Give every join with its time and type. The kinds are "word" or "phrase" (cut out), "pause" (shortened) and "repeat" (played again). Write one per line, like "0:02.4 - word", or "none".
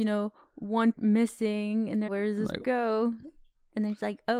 0:00.9 - word
0:02.1 - word
0:02.6 - word